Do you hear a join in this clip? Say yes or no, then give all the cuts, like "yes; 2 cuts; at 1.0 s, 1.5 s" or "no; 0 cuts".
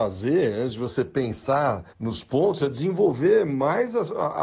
yes; 1 cut; at 1.9 s